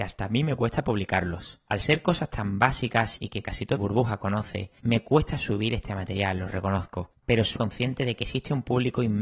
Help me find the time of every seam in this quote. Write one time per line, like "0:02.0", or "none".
0:03.8
0:07.6